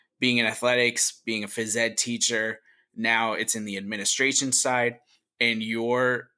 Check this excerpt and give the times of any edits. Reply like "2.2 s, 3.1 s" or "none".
none